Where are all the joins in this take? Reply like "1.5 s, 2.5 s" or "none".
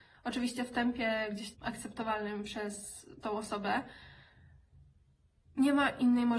1.5 s, 3.2 s